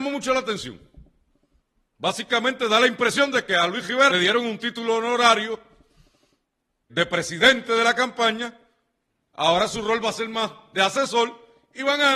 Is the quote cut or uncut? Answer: cut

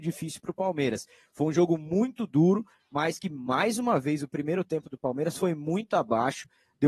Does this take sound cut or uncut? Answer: uncut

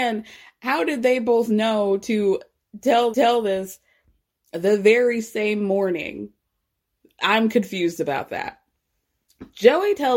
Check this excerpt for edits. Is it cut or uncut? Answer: cut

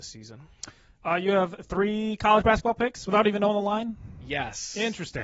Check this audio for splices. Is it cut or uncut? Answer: uncut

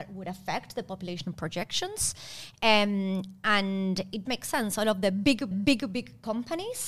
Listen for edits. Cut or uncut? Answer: cut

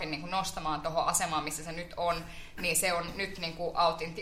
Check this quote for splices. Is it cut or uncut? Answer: uncut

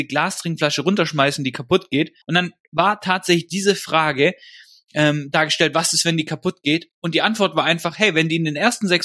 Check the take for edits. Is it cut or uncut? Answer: cut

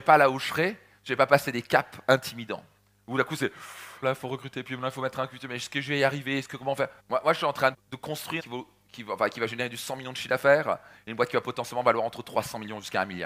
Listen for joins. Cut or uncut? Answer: cut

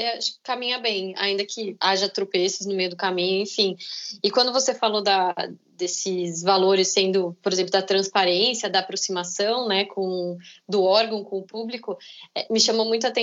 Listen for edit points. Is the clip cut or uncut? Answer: uncut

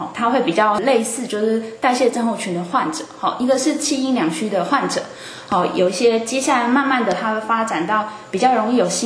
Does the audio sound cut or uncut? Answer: uncut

